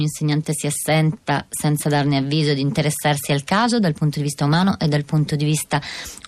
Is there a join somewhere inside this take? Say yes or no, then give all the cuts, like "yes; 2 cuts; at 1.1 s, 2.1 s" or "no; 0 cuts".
no; 0 cuts